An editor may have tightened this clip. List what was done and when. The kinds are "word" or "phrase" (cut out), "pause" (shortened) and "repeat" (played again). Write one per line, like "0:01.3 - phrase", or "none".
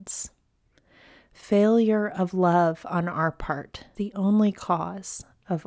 0:04.0 - word